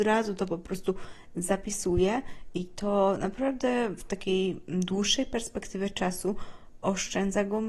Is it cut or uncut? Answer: uncut